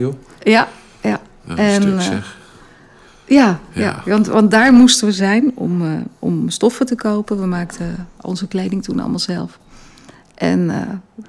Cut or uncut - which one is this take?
uncut